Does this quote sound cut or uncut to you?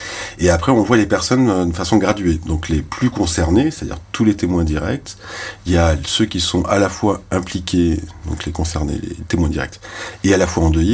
uncut